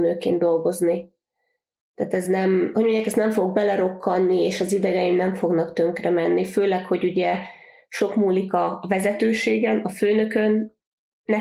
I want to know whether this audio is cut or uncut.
uncut